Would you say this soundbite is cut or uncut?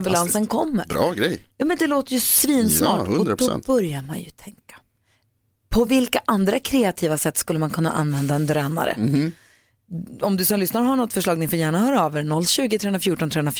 uncut